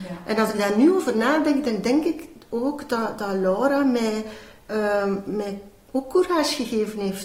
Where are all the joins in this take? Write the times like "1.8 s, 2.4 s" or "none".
none